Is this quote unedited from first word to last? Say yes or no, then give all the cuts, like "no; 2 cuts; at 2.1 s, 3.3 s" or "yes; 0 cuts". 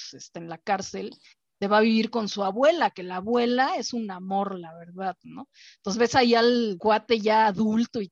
yes; 0 cuts